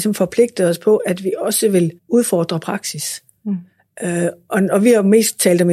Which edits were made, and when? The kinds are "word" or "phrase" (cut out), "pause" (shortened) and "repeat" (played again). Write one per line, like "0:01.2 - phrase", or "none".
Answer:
0:02.0 - pause
0:04.5 - word